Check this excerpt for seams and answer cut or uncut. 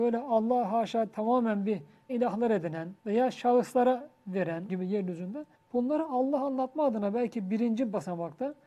cut